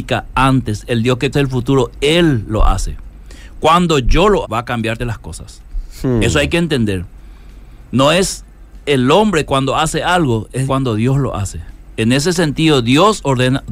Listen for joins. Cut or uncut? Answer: cut